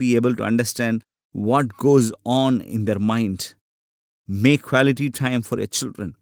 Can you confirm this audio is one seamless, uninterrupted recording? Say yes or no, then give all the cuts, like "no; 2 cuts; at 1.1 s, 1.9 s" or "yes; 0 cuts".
yes; 0 cuts